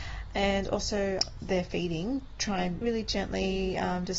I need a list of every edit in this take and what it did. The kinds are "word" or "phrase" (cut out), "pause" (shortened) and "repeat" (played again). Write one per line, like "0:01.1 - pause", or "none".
0:01.4 - word
0:02.8 - word

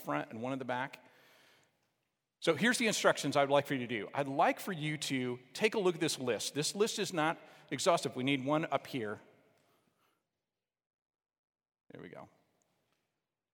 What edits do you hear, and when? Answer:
none

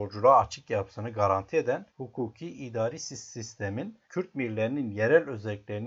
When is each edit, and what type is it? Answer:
0:01.9 - pause
0:04.0 - pause

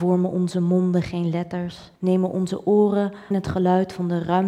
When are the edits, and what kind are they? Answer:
0:01.9 - pause
0:03.3 - word

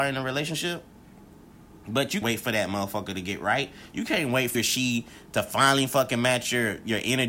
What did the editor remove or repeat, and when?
0:02.2 - word
0:04.5 - word

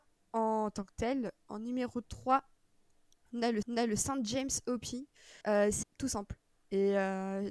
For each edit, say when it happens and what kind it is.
0:03.6 - repeat
0:05.4 - pause
0:05.8 - phrase

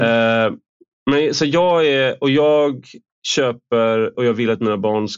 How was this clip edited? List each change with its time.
0:04.1 - word

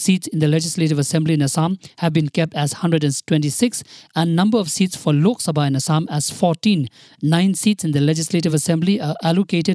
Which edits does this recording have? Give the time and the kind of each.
none

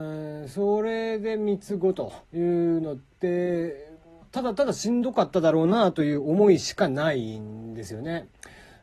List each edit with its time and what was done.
0:02.2 - pause
0:04.2 - phrase

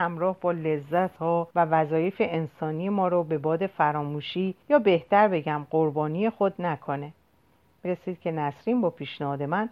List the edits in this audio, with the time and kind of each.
0:01.2 - word
0:01.5 - pause
0:04.6 - pause
0:07.9 - phrase

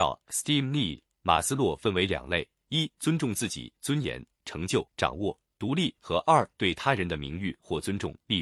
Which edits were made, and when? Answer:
0:04.9 - pause

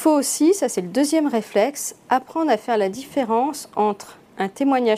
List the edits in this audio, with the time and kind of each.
none

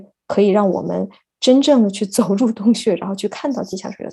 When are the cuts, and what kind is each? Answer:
none

